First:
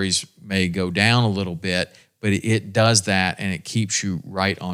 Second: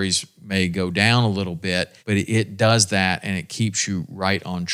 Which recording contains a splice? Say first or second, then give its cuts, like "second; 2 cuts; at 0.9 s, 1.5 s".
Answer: second; 1 cut; at 2.0 s